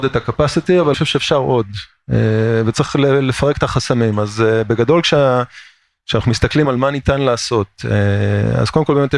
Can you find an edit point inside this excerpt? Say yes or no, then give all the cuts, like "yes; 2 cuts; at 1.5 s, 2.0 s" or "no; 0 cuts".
yes; 2 cuts; at 0.9 s, 6.6 s